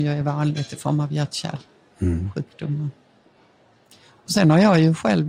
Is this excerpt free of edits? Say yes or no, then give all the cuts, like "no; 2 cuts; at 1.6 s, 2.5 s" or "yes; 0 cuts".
yes; 0 cuts